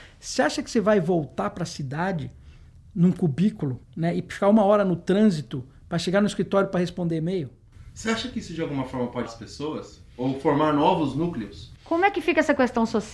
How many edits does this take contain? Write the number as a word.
two